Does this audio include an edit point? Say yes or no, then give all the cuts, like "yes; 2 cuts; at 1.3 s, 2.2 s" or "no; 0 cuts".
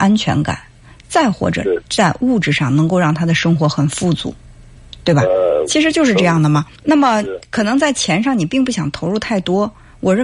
yes; 1 cut; at 6.8 s